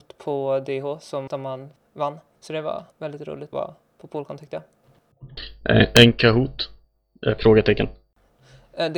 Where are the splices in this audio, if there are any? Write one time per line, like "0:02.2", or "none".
0:01.3
0:02.4
0:02.9
0:03.5